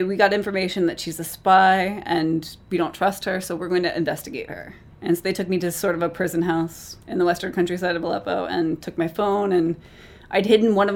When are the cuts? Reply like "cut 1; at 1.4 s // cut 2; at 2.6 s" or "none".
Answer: cut 1; at 4.9 s // cut 2; at 7.0 s